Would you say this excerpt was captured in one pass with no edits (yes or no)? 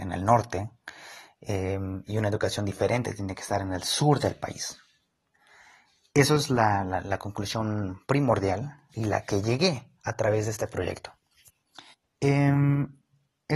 no